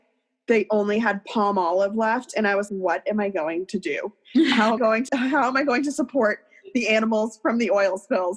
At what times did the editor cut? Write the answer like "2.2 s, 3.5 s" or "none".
2.7 s, 4.8 s, 5.1 s